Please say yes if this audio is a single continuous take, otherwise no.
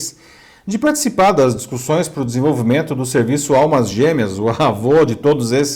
yes